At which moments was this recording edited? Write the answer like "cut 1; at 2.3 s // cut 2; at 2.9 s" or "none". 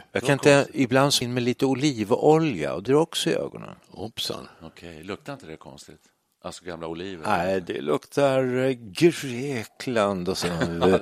cut 1; at 1.2 s // cut 2; at 2.9 s